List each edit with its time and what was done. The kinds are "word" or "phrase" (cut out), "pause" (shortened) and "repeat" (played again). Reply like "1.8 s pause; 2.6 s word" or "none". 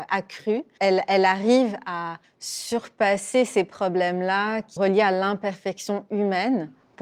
2.2 s pause; 4.8 s word

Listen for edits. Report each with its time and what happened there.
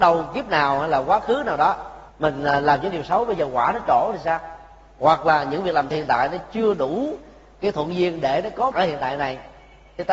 2.1 s pause; 5.9 s phrase; 8.7 s word

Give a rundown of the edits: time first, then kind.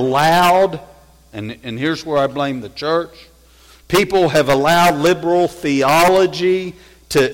none

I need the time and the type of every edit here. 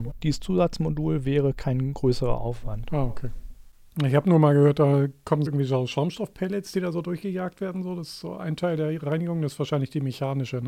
5.5 s word

